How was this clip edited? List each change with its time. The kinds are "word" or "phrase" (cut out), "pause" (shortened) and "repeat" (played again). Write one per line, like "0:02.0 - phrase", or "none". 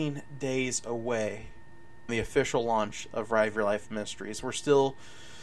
0:02.1 - word